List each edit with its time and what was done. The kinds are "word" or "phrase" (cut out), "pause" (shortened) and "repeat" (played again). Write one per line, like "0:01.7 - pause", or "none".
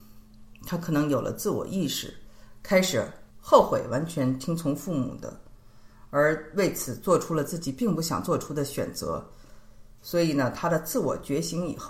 0:03.3 - pause